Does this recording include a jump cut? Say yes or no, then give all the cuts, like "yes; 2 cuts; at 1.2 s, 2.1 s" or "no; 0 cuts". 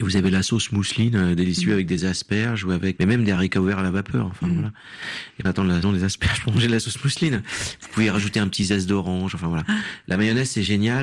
yes; 3 cuts; at 3.0 s, 5.5 s, 5.8 s